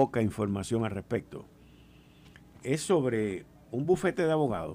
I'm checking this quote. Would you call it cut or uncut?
uncut